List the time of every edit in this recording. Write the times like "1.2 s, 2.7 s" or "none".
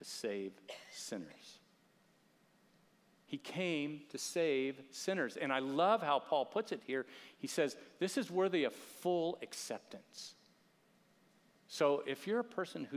none